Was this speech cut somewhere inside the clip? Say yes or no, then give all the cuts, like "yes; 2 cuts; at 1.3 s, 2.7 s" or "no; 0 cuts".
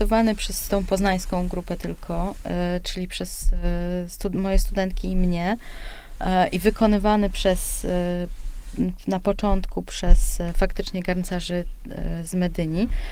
no; 0 cuts